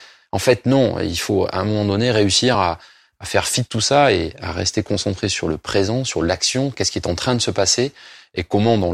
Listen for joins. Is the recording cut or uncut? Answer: uncut